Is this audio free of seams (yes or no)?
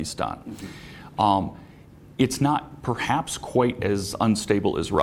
yes